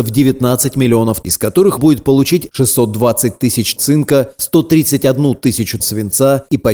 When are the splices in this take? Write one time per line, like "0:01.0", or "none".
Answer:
0:01.2
0:01.8
0:03.8
0:05.8